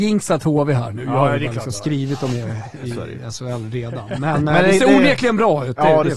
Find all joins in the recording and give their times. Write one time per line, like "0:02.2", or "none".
none

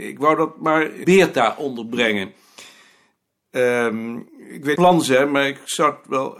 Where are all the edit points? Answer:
0:01.0
0:04.3
0:04.8

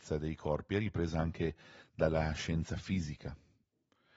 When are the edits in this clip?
none

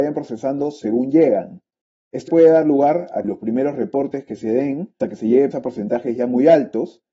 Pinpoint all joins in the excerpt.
0:02.3
0:03.2
0:05.0
0:05.5

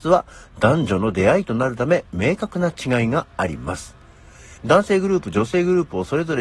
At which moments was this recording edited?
0:04.6

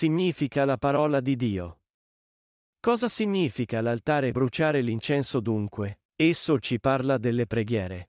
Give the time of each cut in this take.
0:04.3
0:06.1

